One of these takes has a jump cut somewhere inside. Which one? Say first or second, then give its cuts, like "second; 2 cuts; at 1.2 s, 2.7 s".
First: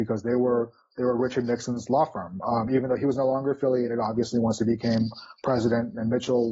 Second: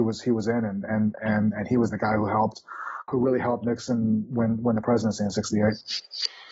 second; 1 cut; at 3.1 s